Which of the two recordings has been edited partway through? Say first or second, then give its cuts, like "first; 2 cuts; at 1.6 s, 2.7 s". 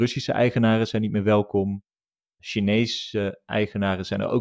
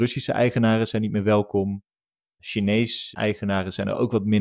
second; 1 cut; at 3.1 s